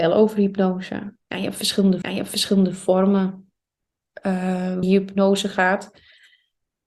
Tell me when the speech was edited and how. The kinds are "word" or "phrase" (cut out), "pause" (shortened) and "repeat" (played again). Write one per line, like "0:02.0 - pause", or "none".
0:01.2 - pause
0:02.0 - repeat
0:04.8 - word